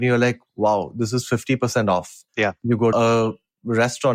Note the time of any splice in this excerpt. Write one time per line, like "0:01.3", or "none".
0:02.3
0:02.9